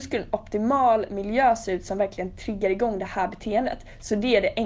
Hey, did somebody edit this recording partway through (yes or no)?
no